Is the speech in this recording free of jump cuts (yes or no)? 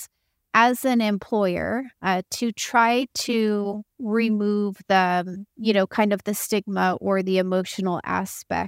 no